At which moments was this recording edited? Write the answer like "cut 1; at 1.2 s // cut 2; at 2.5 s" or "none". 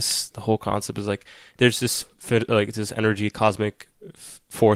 none